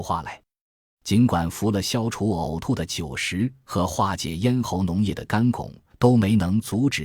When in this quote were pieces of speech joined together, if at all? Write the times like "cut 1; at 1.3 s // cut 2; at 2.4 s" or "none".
cut 1; at 5.9 s